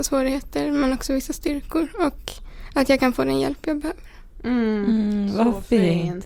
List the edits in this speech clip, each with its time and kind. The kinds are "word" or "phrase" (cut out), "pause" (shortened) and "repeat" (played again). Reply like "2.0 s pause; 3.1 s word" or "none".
none